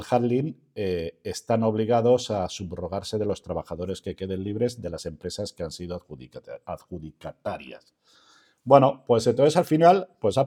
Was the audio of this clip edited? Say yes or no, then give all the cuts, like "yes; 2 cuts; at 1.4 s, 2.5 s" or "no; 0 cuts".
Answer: no; 0 cuts